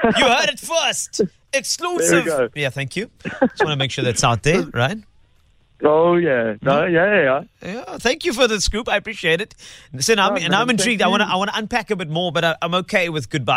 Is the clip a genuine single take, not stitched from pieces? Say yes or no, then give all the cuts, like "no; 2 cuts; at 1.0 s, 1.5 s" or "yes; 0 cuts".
yes; 0 cuts